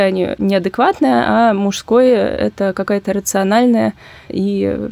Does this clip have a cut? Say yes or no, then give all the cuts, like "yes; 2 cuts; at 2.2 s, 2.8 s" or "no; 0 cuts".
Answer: no; 0 cuts